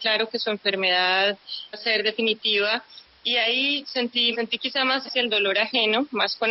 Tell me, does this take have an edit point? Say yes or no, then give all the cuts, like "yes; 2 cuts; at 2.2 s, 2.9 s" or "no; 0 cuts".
yes; 4 cuts; at 1.7 s, 3.8 s, 4.3 s, 5.1 s